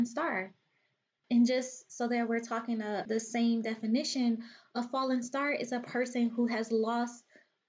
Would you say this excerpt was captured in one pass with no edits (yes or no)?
yes